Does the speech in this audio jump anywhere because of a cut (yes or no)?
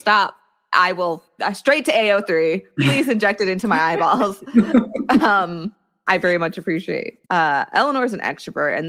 yes